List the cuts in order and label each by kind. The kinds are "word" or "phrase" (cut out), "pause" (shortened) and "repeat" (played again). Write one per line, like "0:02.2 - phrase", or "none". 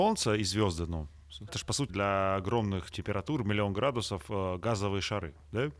0:01.5 - word
0:01.9 - word
0:02.9 - word